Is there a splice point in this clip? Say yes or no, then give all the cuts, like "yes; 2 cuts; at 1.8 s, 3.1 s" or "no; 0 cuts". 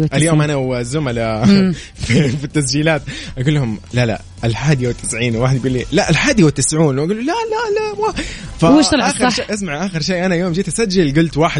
no; 0 cuts